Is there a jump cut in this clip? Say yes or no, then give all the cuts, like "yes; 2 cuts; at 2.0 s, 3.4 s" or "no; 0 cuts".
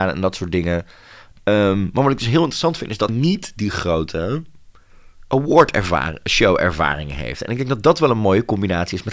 yes; 1 cut; at 3.1 s